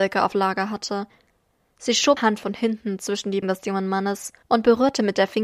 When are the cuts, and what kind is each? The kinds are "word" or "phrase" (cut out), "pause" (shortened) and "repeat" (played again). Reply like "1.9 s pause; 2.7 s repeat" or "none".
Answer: 2.2 s word; 3.4 s word; 4.4 s pause